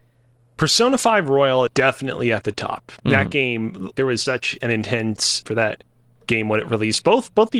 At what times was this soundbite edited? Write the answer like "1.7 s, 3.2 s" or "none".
1.7 s, 3.9 s, 4.3 s, 5.5 s